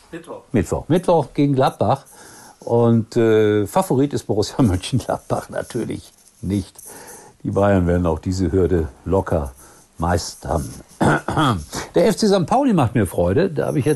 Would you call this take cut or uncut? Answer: uncut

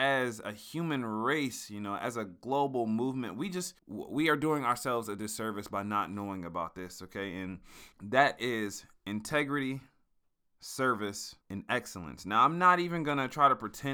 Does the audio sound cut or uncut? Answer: cut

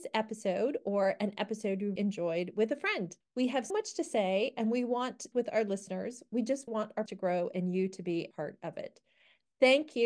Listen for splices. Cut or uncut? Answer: cut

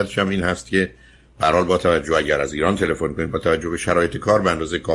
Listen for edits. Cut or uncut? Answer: uncut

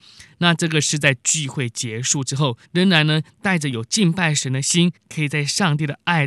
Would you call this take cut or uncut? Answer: cut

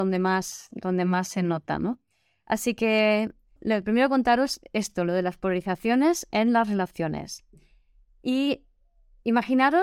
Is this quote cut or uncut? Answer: cut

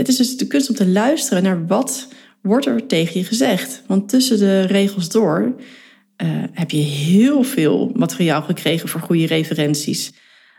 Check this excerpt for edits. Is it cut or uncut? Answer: uncut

